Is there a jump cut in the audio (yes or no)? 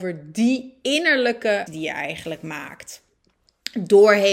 yes